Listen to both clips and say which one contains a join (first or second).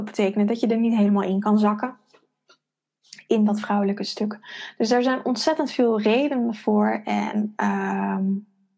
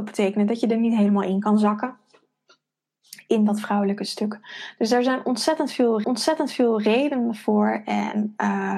second